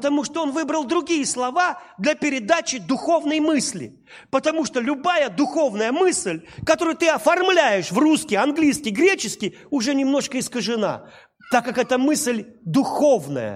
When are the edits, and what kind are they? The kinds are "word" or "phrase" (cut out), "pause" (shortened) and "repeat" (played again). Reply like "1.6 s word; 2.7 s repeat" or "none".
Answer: none